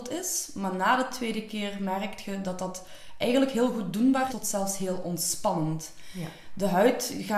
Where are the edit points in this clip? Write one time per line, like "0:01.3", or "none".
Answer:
0:04.3